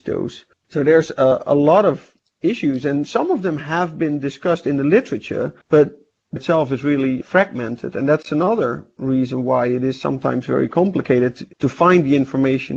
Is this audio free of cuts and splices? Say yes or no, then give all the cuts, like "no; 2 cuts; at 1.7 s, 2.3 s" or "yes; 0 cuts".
no; 4 cuts; at 5.6 s, 6.4 s, 7.2 s, 11.5 s